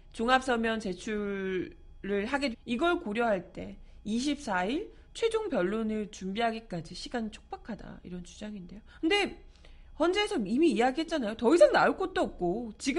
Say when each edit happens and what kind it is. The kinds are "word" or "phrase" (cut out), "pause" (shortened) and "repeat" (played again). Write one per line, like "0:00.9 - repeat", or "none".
0:02.5 - word
0:08.9 - pause